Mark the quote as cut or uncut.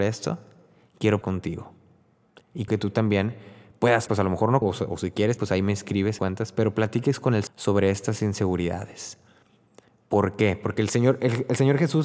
cut